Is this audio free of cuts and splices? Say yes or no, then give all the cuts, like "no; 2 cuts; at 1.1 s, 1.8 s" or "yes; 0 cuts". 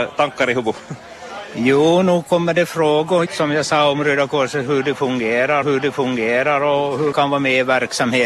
no; 3 cuts; at 3.3 s, 5.6 s, 7.1 s